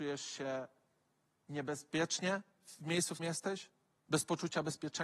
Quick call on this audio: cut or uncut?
cut